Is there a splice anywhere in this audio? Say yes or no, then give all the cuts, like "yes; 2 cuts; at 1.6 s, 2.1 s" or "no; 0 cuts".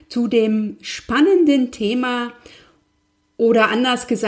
no; 0 cuts